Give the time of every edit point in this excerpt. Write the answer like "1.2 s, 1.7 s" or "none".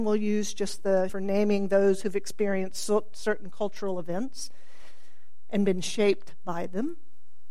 1.1 s